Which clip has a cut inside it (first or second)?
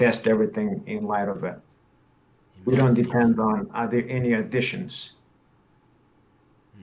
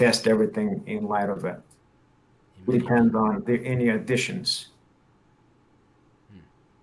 second